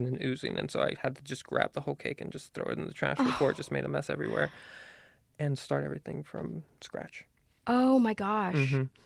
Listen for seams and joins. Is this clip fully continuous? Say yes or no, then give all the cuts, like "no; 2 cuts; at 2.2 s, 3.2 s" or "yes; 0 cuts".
yes; 0 cuts